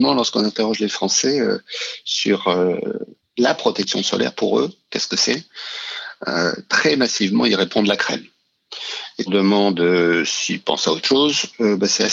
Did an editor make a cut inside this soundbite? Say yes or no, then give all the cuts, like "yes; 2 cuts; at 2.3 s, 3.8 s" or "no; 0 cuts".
yes; 2 cuts; at 3.2 s, 9.3 s